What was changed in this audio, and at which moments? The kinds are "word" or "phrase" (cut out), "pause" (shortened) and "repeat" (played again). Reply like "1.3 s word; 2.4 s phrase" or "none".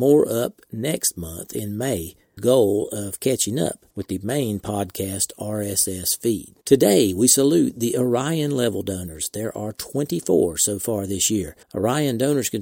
2.4 s phrase; 3.9 s pause; 6.6 s pause; 11.6 s pause